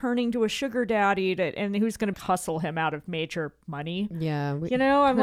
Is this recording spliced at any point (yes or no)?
yes